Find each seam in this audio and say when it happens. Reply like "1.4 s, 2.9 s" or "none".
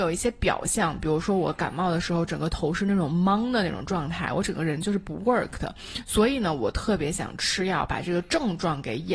none